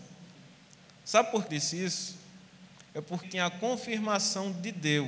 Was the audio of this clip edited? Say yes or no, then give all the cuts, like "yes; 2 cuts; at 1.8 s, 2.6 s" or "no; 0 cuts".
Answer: yes; 2 cuts; at 1.5 s, 3.2 s